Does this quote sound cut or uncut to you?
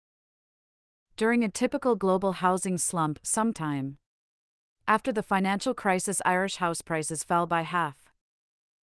cut